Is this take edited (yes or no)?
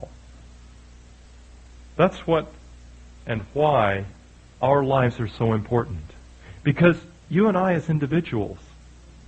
no